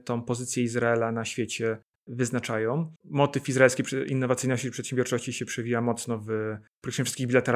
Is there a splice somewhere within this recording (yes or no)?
yes